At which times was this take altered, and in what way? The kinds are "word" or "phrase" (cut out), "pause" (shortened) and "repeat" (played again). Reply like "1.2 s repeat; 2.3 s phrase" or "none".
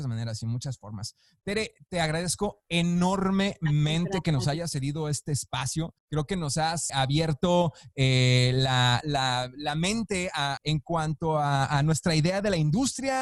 6.0 s pause; 6.9 s word; 9.0 s phrase; 10.6 s phrase